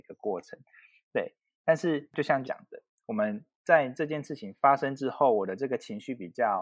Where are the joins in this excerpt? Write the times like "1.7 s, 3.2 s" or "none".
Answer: 2.4 s